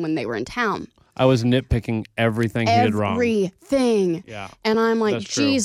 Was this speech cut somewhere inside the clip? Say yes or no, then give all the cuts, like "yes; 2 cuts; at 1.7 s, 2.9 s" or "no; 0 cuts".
no; 0 cuts